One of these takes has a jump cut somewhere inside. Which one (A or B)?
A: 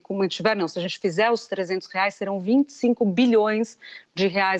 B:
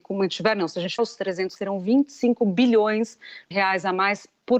B